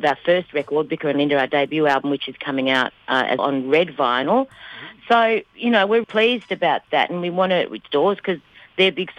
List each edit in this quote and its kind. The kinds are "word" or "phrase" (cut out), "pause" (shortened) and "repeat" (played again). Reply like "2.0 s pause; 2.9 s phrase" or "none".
3.4 s word; 6.0 s word; 7.9 s phrase